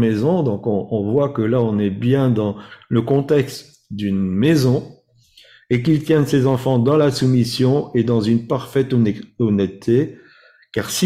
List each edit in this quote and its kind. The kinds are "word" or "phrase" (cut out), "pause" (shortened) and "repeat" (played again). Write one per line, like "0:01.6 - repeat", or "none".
none